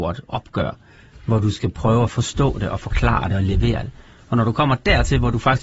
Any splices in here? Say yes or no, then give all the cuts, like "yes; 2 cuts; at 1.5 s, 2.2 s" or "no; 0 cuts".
no; 0 cuts